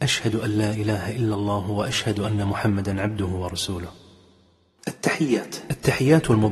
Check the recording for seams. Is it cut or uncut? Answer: uncut